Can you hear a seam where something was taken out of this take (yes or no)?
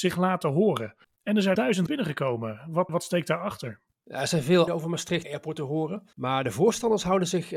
yes